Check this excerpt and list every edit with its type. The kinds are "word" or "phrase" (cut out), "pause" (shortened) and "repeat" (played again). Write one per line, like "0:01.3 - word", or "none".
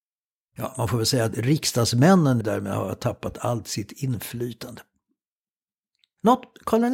0:02.4 - word